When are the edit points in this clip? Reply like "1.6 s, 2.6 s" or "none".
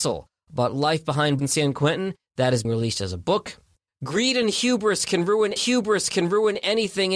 1.4 s, 2.6 s, 5.6 s